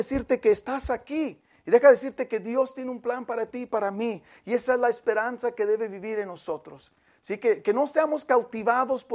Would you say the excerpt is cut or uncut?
uncut